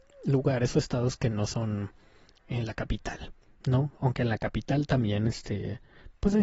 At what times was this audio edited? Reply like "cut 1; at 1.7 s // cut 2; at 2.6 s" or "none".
none